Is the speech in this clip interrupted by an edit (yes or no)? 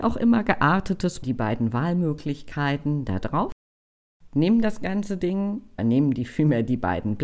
yes